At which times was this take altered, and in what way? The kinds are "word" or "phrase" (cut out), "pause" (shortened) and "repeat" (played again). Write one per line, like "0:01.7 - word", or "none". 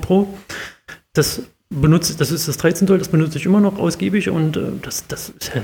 none